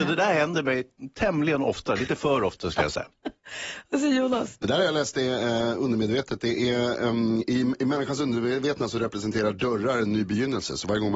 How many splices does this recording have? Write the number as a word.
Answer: zero